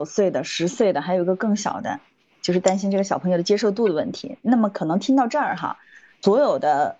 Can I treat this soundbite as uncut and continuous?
yes; 0 cuts

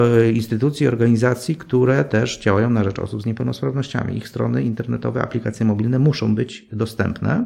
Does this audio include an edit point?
no; 0 cuts

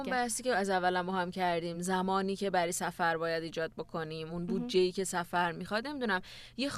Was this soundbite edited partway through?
no; 0 cuts

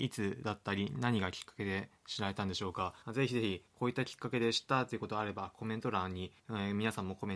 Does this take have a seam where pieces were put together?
yes; 2 cuts; at 3.0 s, 6.4 s

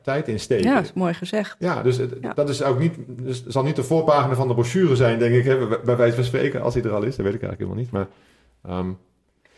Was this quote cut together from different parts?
no; 0 cuts

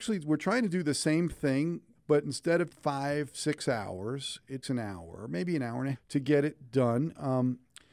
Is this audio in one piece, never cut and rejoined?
no; 4 cuts; at 1.9 s, 2.7 s, 4.6 s, 5.9 s

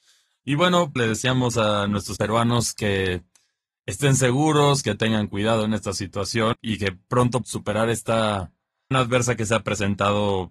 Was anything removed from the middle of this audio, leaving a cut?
yes; 5 cuts; at 1.0 s, 2.2 s, 6.5 s, 7.4 s, 8.9 s

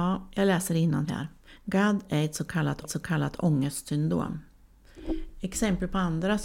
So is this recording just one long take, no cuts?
no; 3 cuts; at 1.1 s, 1.5 s, 2.8 s

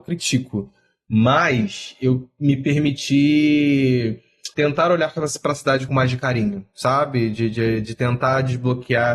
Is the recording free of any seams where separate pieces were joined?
no; 2 cuts; at 4.5 s, 5.9 s

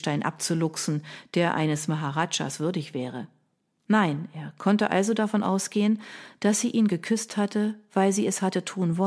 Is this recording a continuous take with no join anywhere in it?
yes; 0 cuts

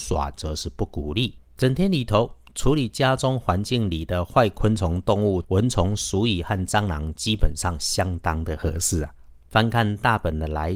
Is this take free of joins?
yes; 0 cuts

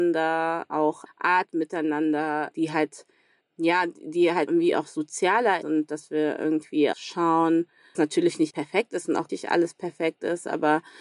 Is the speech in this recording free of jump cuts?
no; 8 cuts; at 1.1 s, 3.4 s, 4.5 s, 5.6 s, 6.9 s, 7.9 s, 8.5 s, 9.3 s

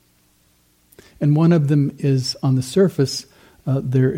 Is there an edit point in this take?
no; 0 cuts

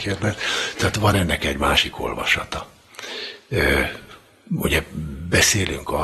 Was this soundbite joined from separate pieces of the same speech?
no; 0 cuts

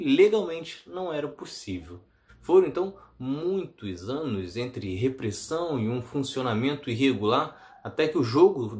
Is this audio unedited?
yes; 0 cuts

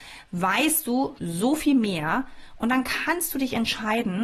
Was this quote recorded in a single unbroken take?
no; 1 cut; at 1.2 s

